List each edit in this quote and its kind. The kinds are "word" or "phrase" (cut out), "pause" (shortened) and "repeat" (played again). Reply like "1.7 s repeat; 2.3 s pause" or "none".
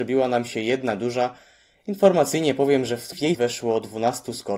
3.3 s word